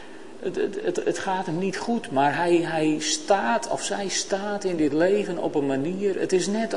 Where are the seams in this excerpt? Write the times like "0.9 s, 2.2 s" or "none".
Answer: none